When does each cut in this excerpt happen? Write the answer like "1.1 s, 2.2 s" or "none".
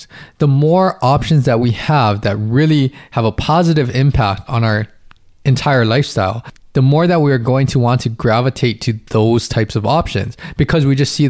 none

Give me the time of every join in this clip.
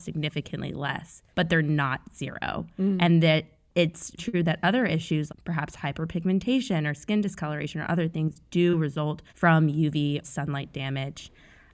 1.3 s, 4.2 s, 5.3 s, 9.3 s, 10.2 s

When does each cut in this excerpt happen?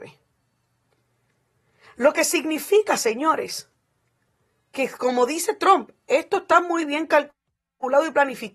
none

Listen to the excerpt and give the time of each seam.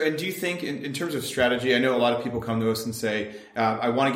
none

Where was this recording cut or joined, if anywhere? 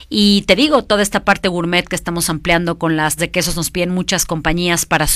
3.2 s

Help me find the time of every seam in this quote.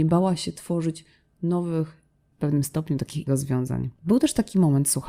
2.3 s, 3.3 s, 3.9 s

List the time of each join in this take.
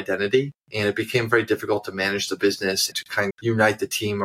2.9 s, 3.3 s

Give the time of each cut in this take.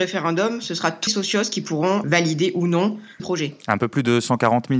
1.1 s, 2.0 s, 3.2 s

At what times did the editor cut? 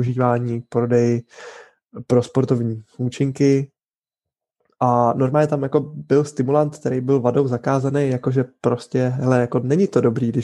none

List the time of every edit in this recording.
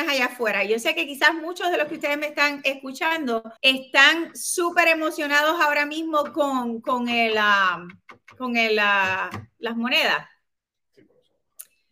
3.6 s

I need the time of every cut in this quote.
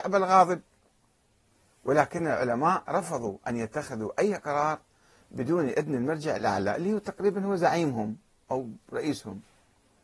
none

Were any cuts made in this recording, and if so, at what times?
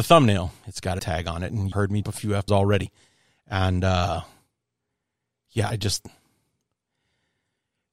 1.0 s, 1.7 s, 2.0 s, 2.5 s, 5.7 s

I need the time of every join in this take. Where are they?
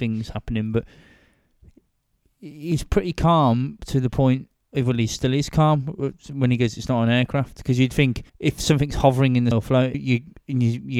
3.8 s, 8.3 s, 9.5 s, 9.9 s

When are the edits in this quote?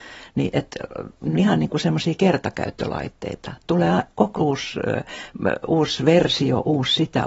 1.3 s, 4.4 s

